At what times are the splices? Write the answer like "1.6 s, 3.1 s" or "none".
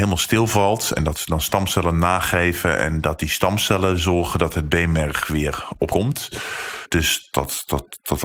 5.9 s, 7.3 s